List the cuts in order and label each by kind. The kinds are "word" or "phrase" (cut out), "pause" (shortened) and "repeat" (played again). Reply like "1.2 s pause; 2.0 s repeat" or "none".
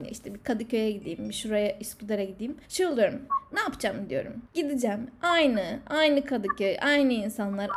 2.6 s pause; 4.4 s pause